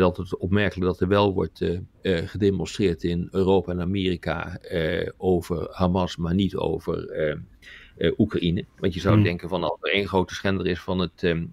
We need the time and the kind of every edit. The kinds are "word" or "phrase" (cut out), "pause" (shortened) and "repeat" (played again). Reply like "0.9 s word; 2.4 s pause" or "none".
1.9 s pause